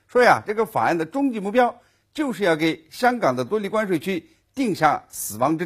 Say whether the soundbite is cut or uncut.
uncut